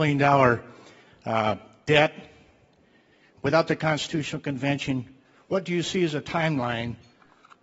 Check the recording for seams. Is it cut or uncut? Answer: uncut